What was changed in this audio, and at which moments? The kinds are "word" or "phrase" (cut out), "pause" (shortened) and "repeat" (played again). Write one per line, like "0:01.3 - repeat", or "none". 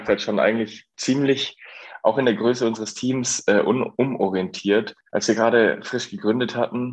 none